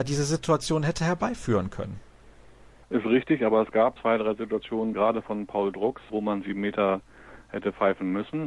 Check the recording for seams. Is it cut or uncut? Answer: cut